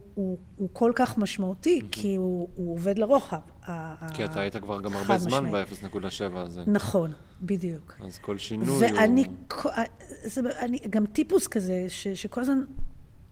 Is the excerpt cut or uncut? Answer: cut